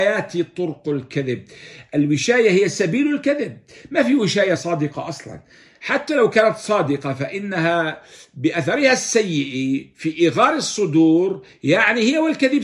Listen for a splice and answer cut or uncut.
uncut